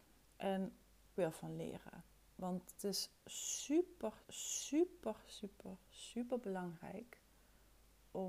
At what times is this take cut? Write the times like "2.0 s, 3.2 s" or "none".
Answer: 1.2 s, 2.8 s, 4.2 s